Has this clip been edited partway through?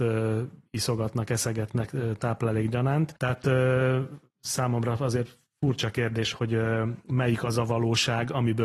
yes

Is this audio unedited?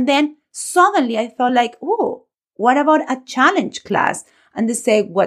yes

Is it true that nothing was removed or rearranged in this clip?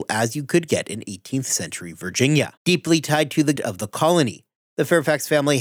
no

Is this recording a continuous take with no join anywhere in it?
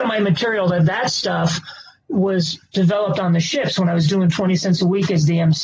yes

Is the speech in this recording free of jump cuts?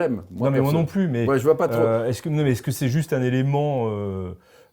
yes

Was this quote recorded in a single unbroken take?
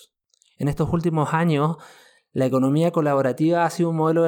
yes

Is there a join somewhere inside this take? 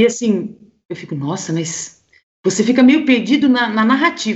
no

